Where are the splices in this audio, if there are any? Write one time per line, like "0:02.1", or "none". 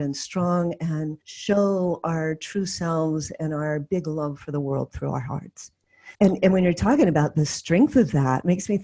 0:01.2
0:06.1